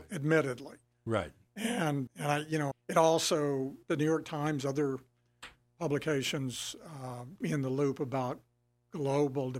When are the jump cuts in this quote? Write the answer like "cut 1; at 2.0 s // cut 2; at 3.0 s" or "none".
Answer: cut 1; at 2.1 s // cut 2; at 2.7 s // cut 3; at 3.8 s // cut 4; at 7.4 s